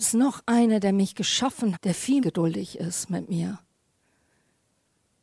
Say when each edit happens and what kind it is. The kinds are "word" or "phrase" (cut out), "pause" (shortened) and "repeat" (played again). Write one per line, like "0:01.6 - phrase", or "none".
0:01.7 - word
0:02.2 - word

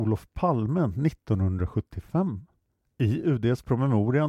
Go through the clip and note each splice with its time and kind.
none

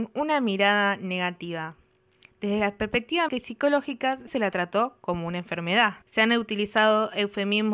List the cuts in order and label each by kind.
0:03.3 - word
0:04.3 - word
0:06.0 - pause

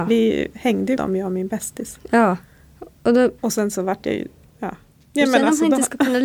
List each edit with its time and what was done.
0:01.0 - word
0:02.9 - pause
0:03.4 - pause

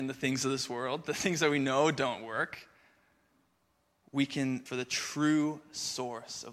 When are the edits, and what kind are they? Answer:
0:04.0 - word
0:04.7 - word

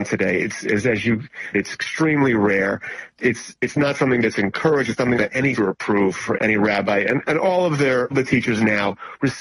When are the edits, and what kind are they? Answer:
0:01.5 - phrase
0:05.1 - word
0:05.5 - phrase
0:06.3 - word
0:08.1 - word

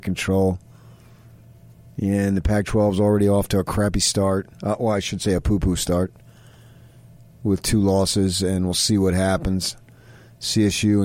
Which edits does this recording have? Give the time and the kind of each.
none

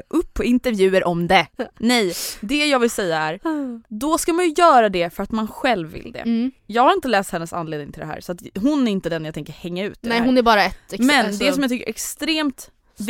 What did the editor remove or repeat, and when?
0:01.7 - pause
0:06.6 - pause

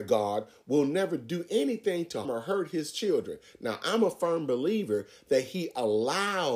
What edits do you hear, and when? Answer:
0:02.2 - word

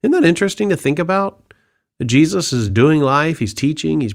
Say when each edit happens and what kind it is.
none

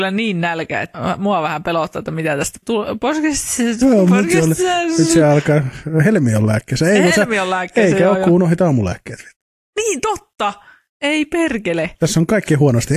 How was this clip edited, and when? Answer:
0:00.9 - word
0:02.6 - word
0:03.8 - word

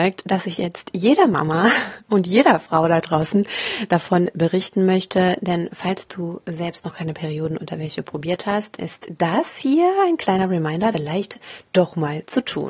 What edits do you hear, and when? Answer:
0:08.8 - word
0:10.9 - word

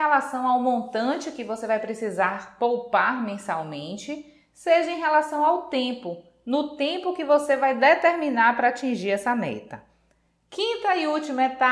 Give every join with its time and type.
none

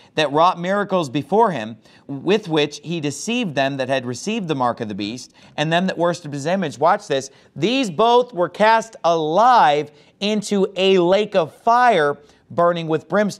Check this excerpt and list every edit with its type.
none

